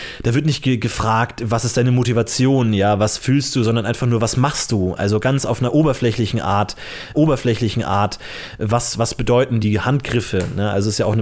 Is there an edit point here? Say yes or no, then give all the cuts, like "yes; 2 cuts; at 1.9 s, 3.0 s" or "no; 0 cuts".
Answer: yes; 2 cuts; at 7.1 s, 9.6 s